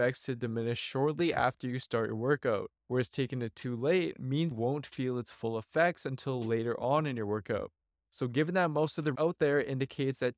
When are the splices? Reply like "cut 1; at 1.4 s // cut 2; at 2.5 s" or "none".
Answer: cut 1; at 2.8 s // cut 2; at 4.5 s // cut 3; at 9.1 s